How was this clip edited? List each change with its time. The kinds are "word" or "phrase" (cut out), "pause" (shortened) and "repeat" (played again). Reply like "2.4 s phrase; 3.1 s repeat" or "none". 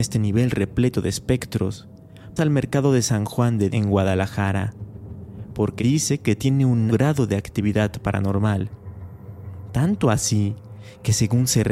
2.4 s word; 3.7 s word; 5.8 s word; 6.9 s word